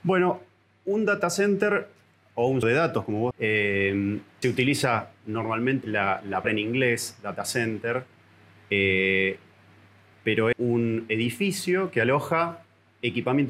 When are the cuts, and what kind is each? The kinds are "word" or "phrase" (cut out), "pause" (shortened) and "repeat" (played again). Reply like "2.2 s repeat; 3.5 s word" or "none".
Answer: 2.6 s word; 3.3 s word; 4.4 s word; 5.8 s word; 6.4 s word; 10.5 s word